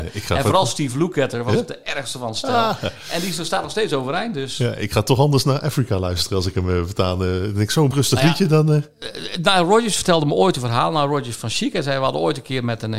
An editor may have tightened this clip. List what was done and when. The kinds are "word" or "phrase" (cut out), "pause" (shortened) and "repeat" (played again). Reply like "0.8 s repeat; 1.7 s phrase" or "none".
7.9 s word